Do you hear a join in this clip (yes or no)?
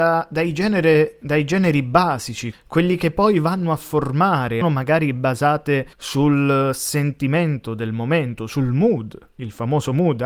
yes